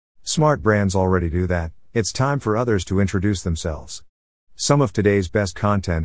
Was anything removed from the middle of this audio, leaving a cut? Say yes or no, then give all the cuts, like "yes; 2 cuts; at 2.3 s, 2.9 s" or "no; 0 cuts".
no; 0 cuts